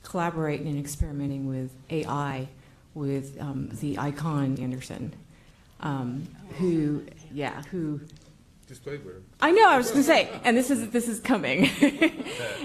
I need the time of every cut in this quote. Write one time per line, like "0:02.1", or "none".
0:04.6